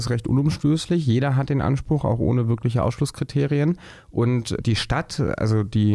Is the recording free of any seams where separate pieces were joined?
no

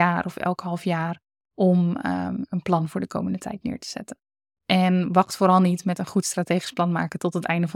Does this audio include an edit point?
no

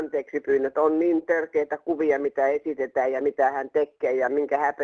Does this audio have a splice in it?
no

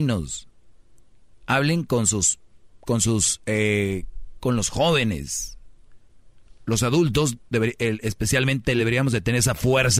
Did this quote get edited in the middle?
yes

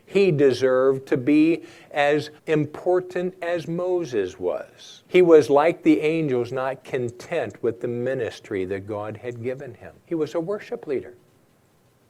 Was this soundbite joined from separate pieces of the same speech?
yes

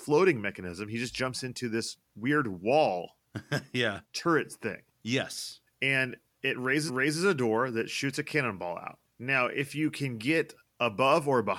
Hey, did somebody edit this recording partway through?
yes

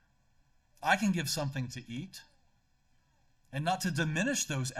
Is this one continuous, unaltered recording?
yes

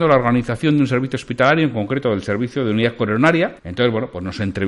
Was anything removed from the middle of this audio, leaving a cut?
yes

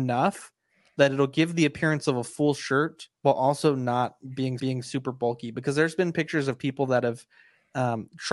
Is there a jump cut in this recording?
yes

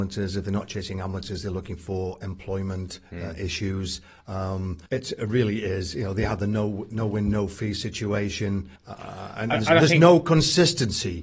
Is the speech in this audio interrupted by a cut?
yes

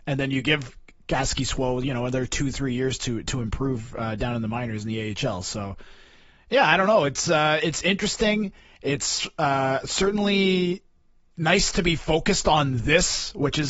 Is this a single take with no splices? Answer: yes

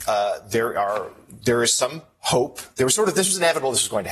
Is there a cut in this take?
no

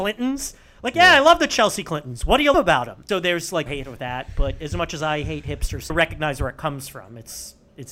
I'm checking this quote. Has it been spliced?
yes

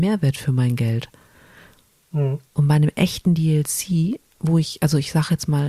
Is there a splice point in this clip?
no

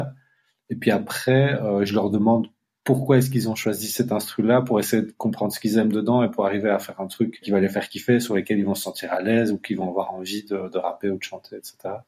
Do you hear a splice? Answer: no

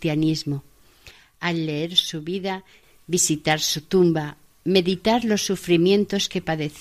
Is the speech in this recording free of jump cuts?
yes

